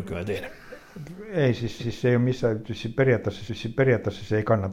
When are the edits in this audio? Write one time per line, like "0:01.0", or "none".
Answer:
0:01.8
0:03.5